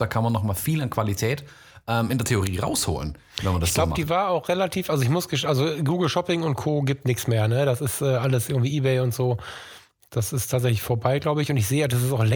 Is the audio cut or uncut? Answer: uncut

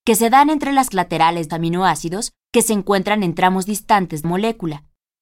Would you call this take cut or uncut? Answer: cut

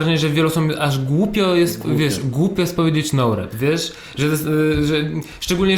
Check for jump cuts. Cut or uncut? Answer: uncut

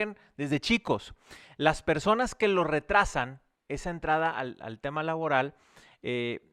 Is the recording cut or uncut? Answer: uncut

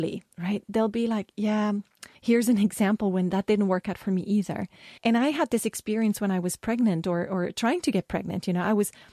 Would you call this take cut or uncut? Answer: cut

